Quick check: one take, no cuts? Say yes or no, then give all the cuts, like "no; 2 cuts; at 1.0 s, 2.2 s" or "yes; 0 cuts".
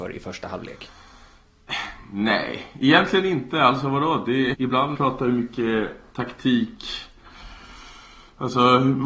no; 2 cuts; at 4.5 s, 4.9 s